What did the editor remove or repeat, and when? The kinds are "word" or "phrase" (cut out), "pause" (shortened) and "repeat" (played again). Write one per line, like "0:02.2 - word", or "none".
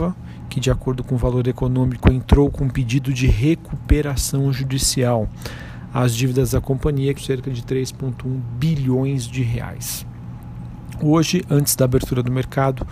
0:07.2 - word